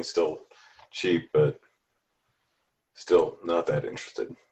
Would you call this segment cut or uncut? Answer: uncut